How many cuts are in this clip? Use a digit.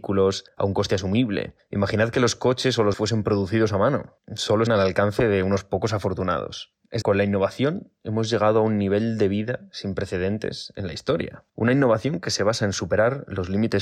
4